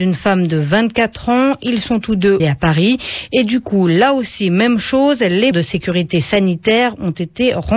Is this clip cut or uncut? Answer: cut